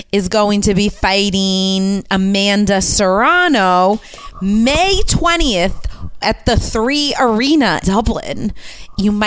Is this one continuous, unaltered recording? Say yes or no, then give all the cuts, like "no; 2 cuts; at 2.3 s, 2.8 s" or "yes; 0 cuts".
no; 2 cuts; at 6.2 s, 7.8 s